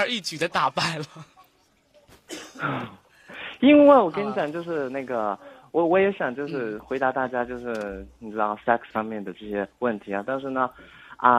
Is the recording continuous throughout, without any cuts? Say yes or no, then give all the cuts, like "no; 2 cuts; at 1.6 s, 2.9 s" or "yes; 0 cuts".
no; 1 cut; at 8.9 s